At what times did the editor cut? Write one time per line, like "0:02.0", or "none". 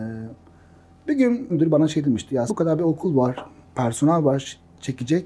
0:01.5
0:02.5
0:03.6